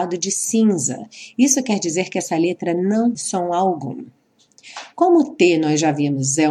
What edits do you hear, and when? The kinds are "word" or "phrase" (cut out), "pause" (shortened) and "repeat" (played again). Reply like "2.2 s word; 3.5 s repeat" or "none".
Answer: 3.1 s word